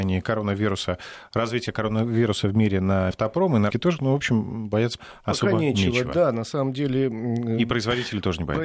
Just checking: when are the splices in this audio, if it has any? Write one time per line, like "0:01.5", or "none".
0:03.1
0:03.7
0:05.0